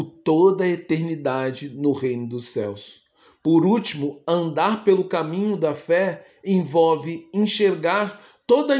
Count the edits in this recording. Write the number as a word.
zero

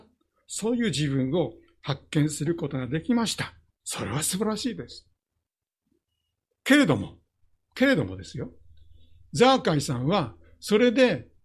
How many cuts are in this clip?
two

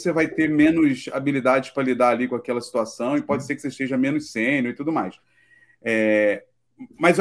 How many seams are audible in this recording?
zero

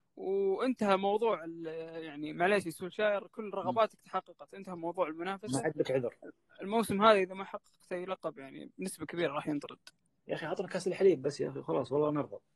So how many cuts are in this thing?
zero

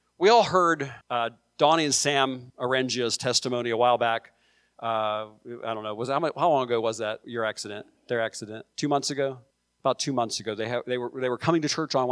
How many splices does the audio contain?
four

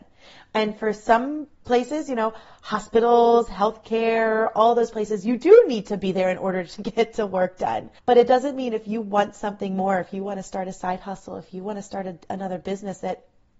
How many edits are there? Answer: two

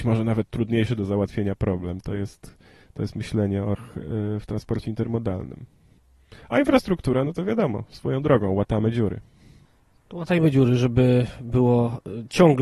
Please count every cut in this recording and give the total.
one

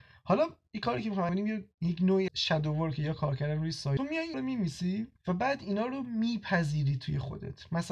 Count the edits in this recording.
six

